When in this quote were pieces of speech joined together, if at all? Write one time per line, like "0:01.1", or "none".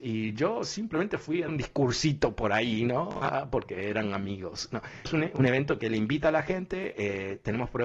0:01.5
0:05.0